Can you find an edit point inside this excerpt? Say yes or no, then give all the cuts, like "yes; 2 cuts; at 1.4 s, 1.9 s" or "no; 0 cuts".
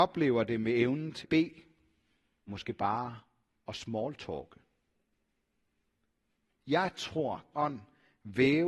yes; 3 cuts; at 1.2 s, 2.5 s, 7.5 s